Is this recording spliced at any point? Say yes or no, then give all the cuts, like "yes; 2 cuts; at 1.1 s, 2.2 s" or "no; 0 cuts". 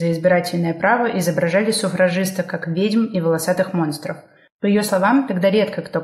no; 0 cuts